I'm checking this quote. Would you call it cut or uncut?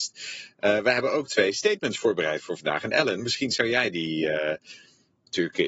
uncut